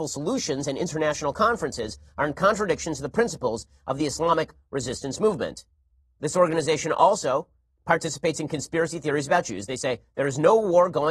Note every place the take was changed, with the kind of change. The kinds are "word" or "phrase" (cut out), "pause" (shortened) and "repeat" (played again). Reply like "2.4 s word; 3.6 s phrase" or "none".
6.0 s pause; 7.7 s pause